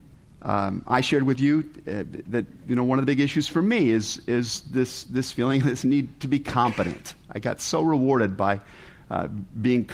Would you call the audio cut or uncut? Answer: uncut